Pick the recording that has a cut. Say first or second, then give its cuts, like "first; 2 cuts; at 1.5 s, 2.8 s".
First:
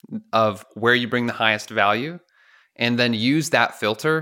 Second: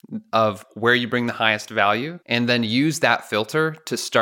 second; 1 cut; at 2.2 s